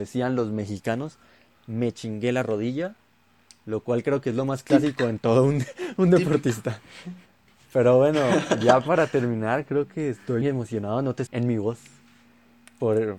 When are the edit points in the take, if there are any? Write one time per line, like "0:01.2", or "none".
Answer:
0:10.4
0:11.3